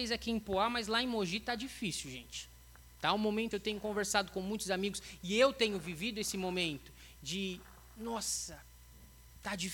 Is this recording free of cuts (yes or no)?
no